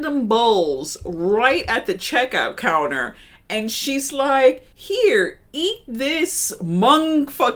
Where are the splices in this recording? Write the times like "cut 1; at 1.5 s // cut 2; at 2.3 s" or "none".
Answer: cut 1; at 4.7 s